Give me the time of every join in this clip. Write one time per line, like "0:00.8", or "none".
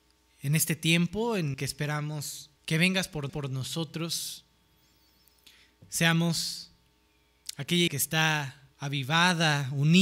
0:01.5
0:02.6
0:03.3
0:07.9
0:08.7